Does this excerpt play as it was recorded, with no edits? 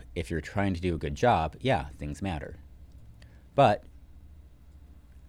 no; 1 cut; at 2.0 s

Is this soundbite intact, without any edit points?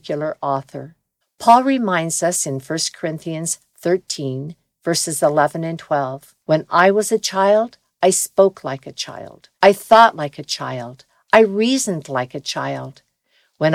no; 3 cuts; at 1.2 s, 6.4 s, 9.6 s

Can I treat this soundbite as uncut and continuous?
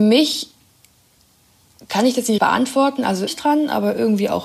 no; 2 cuts; at 2.4 s, 3.3 s

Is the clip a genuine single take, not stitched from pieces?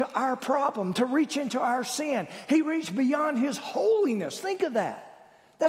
yes; 0 cuts

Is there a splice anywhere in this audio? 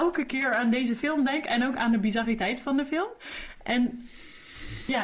no; 0 cuts

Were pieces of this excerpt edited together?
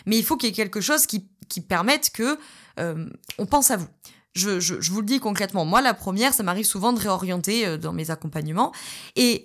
no; 0 cuts

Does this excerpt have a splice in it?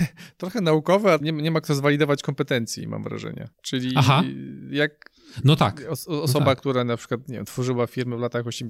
yes; 2 cuts; at 1.2 s, 3.5 s

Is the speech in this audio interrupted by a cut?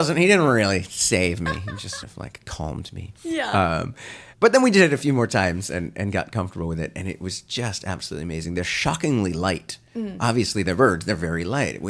yes; 2 cuts; at 2.0 s, 4.3 s

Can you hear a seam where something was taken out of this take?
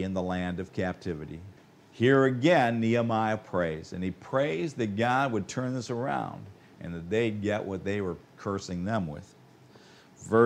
yes; 1 cut; at 1.6 s

